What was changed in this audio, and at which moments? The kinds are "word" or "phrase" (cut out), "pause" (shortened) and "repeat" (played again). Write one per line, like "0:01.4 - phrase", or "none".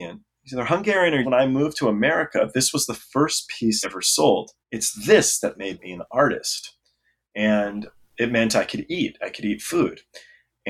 0:01.2 - phrase
0:03.8 - word
0:04.6 - pause